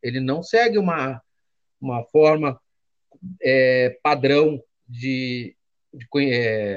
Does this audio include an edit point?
no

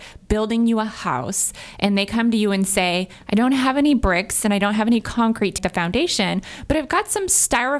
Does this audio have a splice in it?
yes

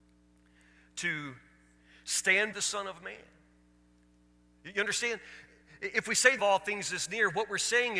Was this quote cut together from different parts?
yes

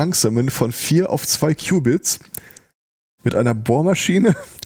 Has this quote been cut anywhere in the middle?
no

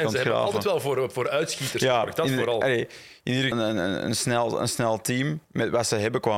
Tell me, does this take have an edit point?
yes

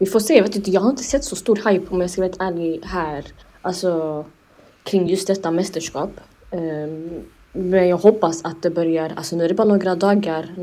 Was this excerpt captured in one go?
yes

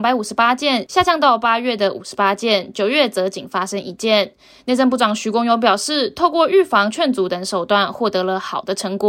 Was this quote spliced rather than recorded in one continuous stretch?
no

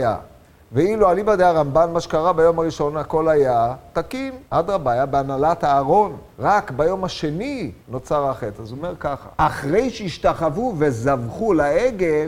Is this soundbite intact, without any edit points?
no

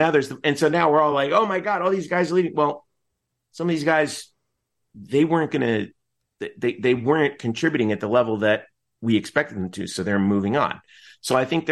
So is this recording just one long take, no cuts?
yes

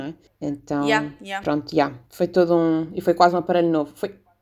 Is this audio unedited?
yes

